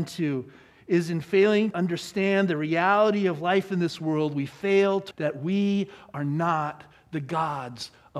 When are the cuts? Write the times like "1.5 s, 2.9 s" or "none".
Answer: 1.7 s, 5.1 s